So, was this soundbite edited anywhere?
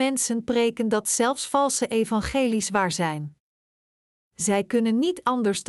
no; 0 cuts

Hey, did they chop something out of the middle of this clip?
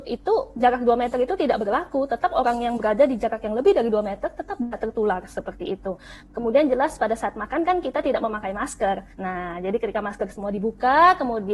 yes; 1 cut; at 9.1 s

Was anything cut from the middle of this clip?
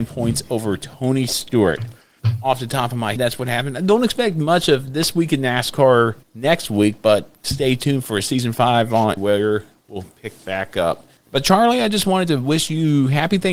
yes; 4 cuts; at 3.2 s, 6.2 s, 9.2 s, 10.4 s

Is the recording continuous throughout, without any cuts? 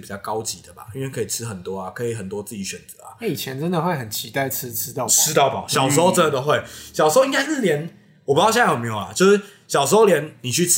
yes; 0 cuts

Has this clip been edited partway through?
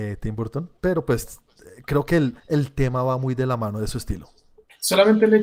yes; 1 cut; at 2.4 s

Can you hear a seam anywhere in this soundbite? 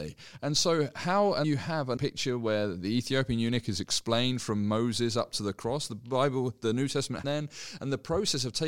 yes; 3 cuts; at 1.4 s, 2.0 s, 7.2 s

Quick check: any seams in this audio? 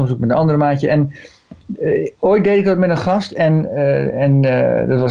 no; 0 cuts

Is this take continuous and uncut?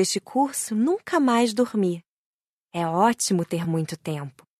yes; 0 cuts

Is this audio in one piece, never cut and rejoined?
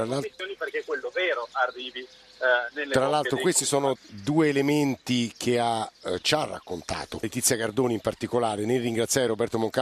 no; 2 cuts; at 3.9 s, 7.2 s

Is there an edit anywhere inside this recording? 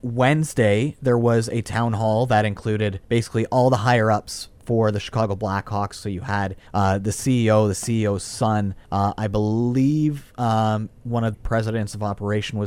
yes; 4 cuts; at 3.0 s, 6.7 s, 8.8 s, 11.3 s

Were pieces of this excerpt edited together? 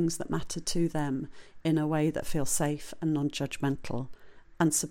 no; 0 cuts

